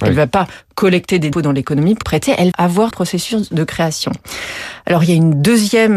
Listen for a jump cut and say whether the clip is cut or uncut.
cut